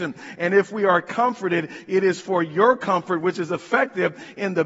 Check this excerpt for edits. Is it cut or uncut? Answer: uncut